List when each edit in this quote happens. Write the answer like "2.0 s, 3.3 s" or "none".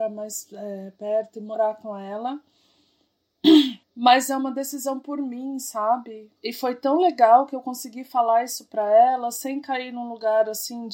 3.8 s, 6.4 s